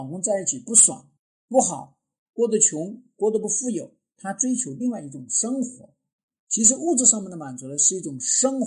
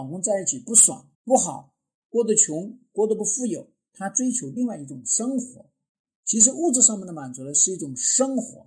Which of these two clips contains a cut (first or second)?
second